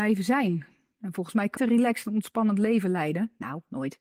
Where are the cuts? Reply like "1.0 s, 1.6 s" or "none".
1.6 s